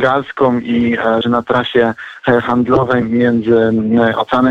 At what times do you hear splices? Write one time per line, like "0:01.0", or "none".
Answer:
0:01.2
0:03.0